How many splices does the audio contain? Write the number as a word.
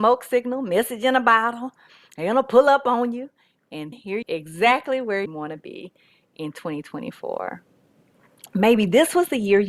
three